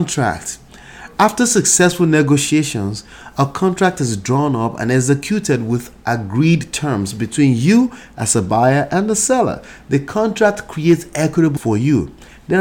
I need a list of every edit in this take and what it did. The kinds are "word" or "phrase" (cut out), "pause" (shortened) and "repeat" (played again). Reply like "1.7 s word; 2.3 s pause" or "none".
11.6 s word